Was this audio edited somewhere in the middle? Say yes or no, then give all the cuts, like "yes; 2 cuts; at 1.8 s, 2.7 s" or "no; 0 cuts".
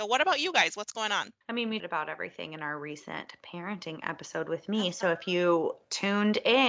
yes; 2 cuts; at 1.4 s, 1.8 s